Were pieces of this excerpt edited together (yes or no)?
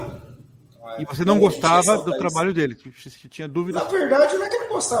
no